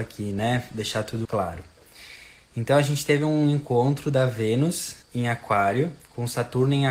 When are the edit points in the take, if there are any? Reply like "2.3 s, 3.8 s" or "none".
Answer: 1.2 s, 5.0 s